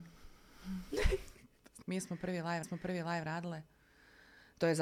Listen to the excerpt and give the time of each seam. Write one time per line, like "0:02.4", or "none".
0:01.8
0:02.6